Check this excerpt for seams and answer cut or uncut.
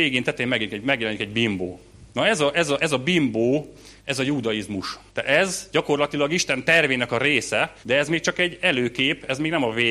cut